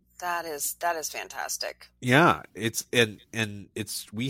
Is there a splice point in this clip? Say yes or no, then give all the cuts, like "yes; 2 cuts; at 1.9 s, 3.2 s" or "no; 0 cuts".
no; 0 cuts